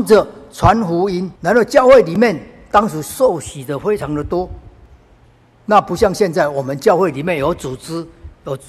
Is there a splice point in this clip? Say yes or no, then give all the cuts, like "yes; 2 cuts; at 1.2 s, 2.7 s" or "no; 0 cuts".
yes; 1 cut; at 1.4 s